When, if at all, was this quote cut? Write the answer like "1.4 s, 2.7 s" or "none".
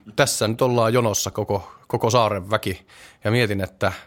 none